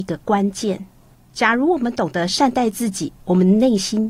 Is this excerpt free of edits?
no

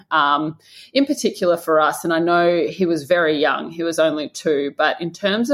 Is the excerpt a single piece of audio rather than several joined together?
yes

